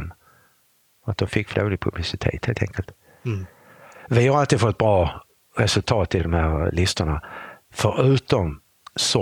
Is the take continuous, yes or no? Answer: no